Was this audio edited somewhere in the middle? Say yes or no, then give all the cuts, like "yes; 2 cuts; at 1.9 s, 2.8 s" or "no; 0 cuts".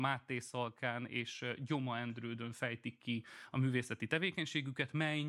no; 0 cuts